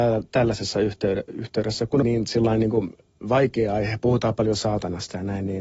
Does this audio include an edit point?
yes; 2 cuts; at 2.0 s, 3.2 s

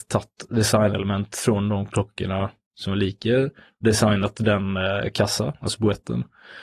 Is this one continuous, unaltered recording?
yes; 0 cuts

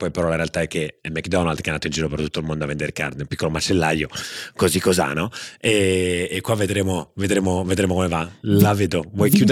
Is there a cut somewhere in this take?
no; 0 cuts

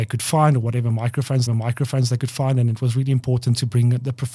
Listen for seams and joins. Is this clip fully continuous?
no; 1 cut; at 1.5 s

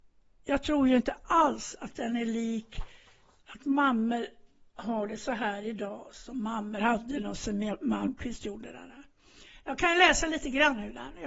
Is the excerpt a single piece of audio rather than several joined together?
yes; 0 cuts

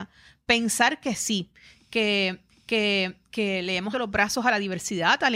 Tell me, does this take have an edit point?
yes; 2 cuts; at 2.5 s, 3.9 s

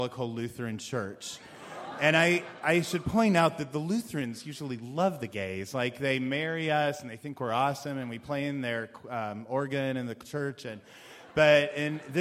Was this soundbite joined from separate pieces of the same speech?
no; 0 cuts

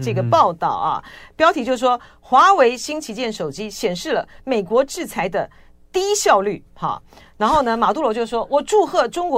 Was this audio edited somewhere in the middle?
no; 0 cuts

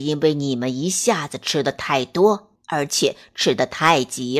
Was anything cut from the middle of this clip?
yes; 1 cut; at 2.6 s

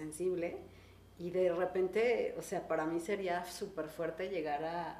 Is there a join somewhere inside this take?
no; 0 cuts

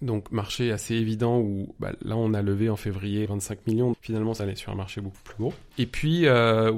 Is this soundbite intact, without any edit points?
no; 3 cuts; at 3.3 s, 3.9 s, 4.4 s

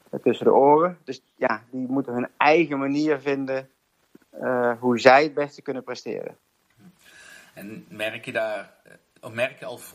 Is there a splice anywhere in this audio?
no; 0 cuts

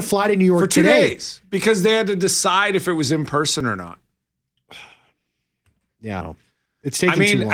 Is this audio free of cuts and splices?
no; 1 cut; at 6.2 s

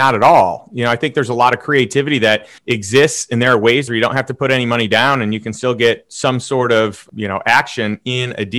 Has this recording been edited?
yes; 2 cuts; at 2.6 s, 3.9 s

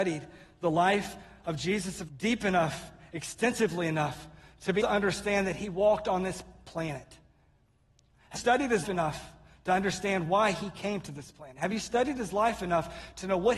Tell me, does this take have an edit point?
yes; 4 cuts; at 2.1 s, 4.8 s, 8.4 s, 8.8 s

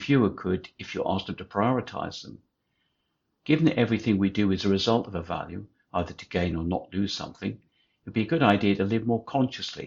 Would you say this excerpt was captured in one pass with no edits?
yes; 0 cuts

